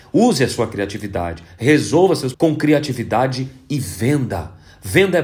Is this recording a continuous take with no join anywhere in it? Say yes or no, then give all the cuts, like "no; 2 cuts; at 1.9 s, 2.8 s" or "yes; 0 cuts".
no; 1 cut; at 2.3 s